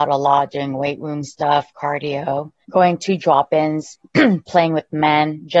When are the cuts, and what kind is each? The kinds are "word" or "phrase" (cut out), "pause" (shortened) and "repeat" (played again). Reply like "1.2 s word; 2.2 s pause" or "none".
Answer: 2.6 s pause; 4.1 s pause